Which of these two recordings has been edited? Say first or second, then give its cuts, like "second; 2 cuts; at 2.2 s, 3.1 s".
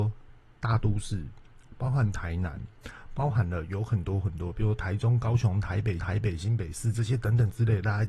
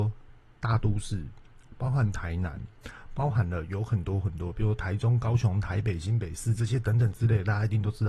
first; 1 cut; at 6.0 s